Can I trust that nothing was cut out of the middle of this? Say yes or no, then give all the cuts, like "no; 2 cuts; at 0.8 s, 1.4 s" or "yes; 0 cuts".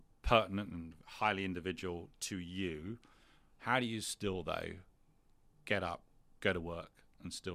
yes; 0 cuts